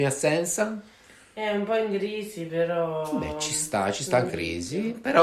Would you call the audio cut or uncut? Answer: cut